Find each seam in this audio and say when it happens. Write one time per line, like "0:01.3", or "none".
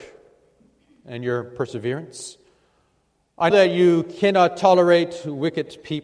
0:03.5